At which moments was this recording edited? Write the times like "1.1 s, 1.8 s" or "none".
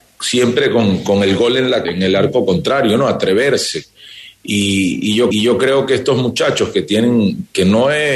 1.8 s, 5.3 s